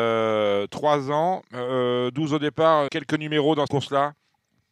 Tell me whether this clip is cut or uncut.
cut